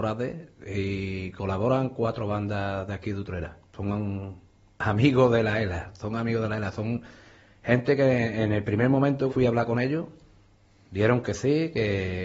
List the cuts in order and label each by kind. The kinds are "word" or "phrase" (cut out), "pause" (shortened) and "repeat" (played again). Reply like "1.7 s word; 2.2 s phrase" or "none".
3.7 s pause; 9.3 s phrase